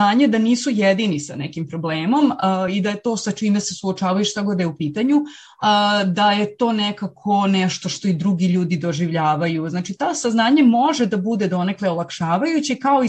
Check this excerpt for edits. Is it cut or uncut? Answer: uncut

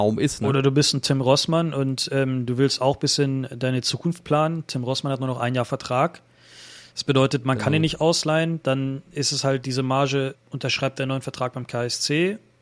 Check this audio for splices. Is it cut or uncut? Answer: cut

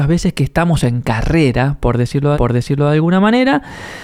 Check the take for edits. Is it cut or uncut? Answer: cut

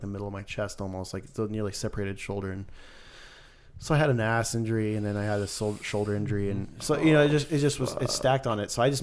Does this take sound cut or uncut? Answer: uncut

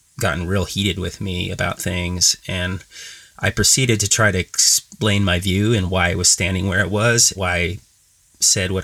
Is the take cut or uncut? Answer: cut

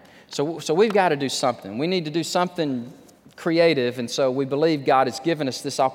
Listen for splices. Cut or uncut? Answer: cut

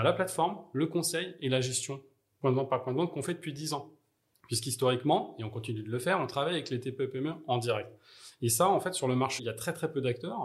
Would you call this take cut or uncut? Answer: cut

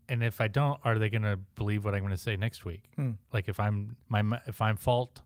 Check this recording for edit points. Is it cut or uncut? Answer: cut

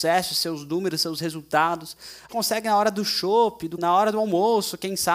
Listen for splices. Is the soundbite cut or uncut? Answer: cut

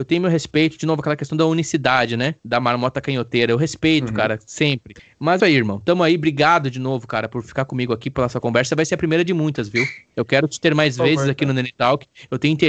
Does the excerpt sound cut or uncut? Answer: cut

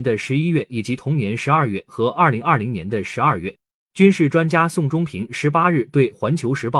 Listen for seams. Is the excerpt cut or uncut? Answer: uncut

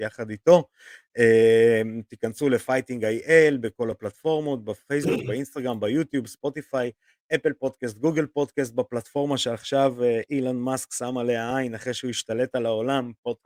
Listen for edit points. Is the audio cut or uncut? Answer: uncut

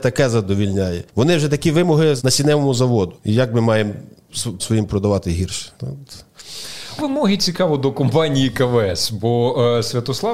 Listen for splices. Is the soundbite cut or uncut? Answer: cut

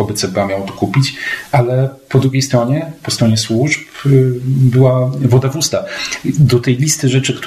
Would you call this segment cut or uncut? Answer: uncut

